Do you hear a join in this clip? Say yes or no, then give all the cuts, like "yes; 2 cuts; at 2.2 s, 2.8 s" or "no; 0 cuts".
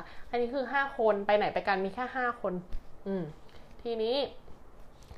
no; 0 cuts